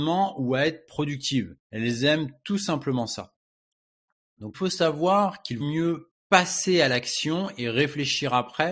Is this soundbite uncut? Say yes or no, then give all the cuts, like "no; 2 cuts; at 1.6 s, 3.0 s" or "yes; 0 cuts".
no; 4 cuts; at 1.6 s, 4.5 s, 5.6 s, 6.2 s